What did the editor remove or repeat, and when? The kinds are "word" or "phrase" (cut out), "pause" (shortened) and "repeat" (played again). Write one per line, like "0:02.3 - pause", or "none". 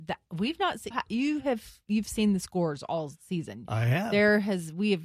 0:00.9 - word